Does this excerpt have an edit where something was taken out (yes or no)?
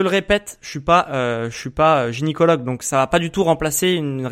no